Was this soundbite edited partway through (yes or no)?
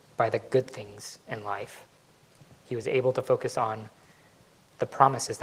no